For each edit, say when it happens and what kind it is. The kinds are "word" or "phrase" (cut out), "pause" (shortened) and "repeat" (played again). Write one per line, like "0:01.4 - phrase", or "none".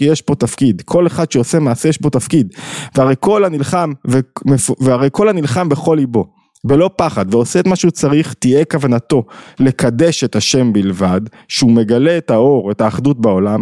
none